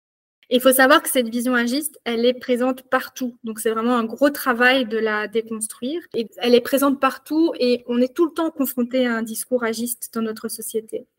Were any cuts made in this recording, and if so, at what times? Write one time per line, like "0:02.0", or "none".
0:06.3